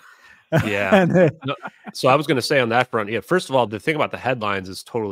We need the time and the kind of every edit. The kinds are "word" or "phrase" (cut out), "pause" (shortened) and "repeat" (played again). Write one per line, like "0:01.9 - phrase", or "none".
0:03.7 - word